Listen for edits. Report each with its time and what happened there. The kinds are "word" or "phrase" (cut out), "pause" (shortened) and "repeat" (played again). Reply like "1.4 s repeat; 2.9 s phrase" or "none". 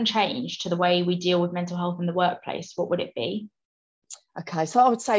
none